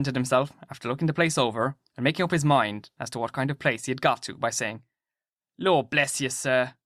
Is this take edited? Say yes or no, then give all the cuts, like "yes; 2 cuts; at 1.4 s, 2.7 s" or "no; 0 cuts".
no; 0 cuts